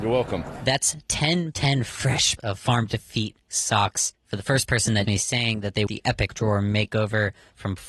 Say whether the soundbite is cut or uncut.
cut